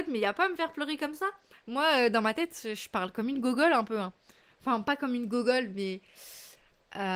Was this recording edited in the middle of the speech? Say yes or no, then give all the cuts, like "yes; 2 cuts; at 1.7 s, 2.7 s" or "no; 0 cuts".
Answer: no; 0 cuts